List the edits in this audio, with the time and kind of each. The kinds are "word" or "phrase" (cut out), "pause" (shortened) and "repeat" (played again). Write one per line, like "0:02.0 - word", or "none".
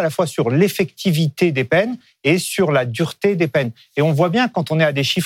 none